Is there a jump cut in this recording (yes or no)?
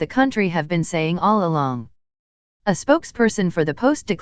no